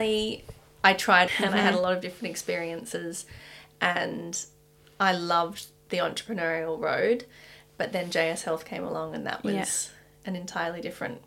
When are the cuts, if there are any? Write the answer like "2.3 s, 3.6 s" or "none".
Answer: 1.3 s